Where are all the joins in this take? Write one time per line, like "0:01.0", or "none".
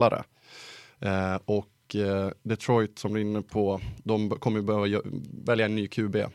none